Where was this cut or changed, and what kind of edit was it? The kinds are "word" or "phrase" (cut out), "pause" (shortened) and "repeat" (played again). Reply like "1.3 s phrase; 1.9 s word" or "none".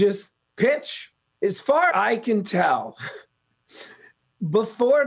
1.9 s word

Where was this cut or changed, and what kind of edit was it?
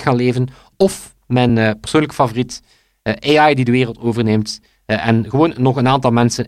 none

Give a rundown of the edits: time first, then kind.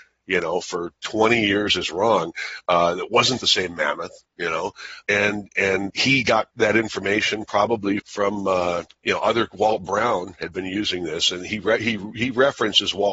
4.2 s pause; 5.0 s word; 5.9 s word; 8.0 s word; 8.9 s pause

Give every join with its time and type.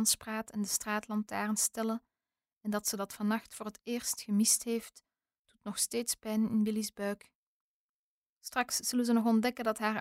none

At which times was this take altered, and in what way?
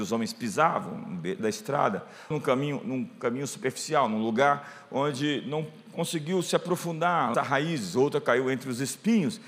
1.4 s word; 2.3 s word; 7.3 s word

